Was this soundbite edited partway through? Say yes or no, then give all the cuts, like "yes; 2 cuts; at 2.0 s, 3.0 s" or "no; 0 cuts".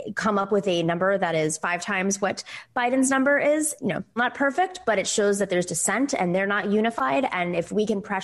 yes; 2 cuts; at 3.8 s, 4.2 s